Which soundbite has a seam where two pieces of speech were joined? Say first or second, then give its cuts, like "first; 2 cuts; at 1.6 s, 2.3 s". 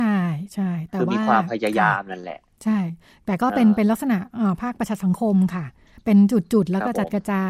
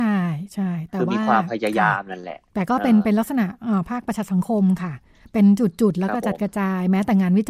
second; 1 cut; at 2.5 s